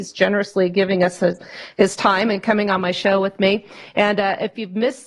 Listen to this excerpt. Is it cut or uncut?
uncut